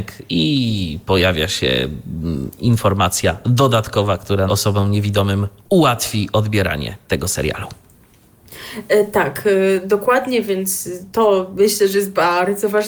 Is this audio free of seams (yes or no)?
no